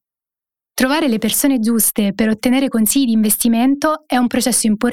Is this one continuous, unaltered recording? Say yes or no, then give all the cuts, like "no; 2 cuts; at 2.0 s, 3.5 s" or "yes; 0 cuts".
yes; 0 cuts